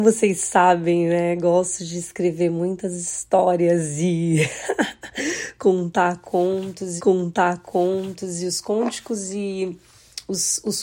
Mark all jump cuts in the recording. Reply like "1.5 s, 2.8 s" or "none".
7.0 s